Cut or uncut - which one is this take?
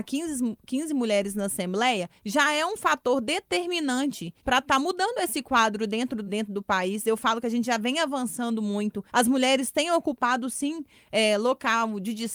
cut